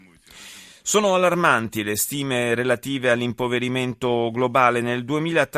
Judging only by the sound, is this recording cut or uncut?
uncut